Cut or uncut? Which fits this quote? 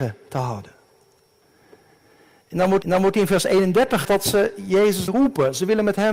cut